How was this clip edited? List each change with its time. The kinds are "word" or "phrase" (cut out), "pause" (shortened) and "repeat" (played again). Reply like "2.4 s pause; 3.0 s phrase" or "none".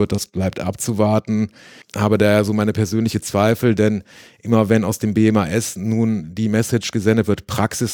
none